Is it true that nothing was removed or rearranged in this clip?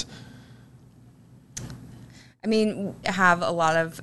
no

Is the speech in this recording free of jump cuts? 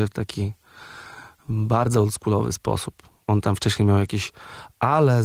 no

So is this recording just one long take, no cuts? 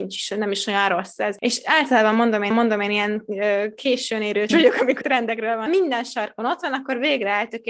no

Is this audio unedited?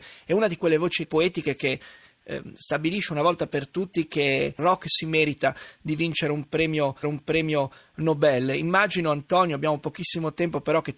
no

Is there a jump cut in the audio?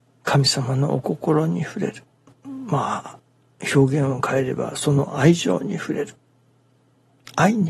no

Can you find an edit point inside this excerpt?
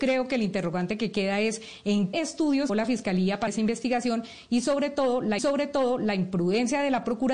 yes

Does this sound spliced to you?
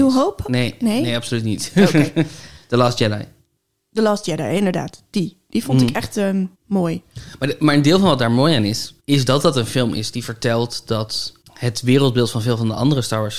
yes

